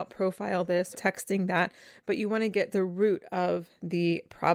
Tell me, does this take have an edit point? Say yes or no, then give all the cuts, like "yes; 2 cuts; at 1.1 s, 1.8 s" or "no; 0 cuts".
yes; 2 cuts; at 0.9 s, 2.7 s